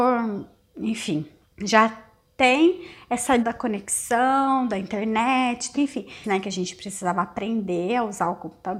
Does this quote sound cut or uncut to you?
cut